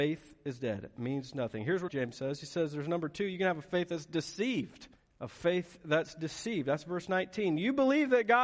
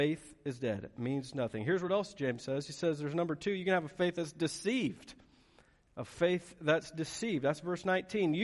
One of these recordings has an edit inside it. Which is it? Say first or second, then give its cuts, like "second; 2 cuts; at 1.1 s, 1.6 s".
first; 2 cuts; at 1.9 s, 5.0 s